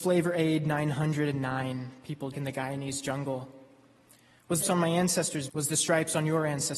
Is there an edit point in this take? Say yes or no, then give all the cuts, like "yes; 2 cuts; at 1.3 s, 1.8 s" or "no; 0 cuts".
yes; 3 cuts; at 2.3 s, 4.6 s, 5.5 s